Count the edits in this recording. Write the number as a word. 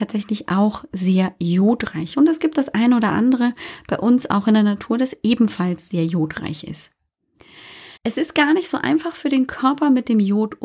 one